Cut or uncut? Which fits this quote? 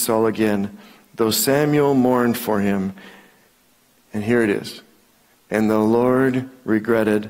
uncut